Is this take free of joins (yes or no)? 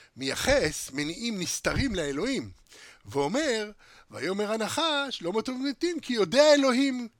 yes